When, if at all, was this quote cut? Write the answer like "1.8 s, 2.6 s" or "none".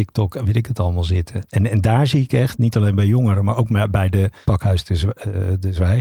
4.4 s